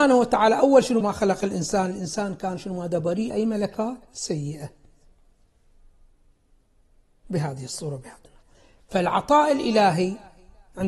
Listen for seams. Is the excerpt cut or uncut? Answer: cut